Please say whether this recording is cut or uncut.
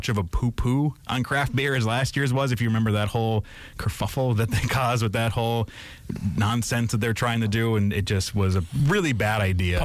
uncut